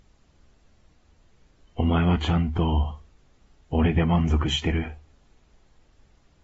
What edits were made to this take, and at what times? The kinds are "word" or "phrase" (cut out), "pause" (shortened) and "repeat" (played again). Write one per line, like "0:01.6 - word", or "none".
none